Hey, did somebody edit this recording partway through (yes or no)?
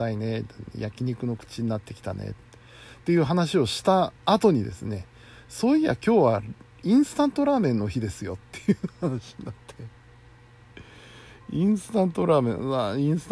yes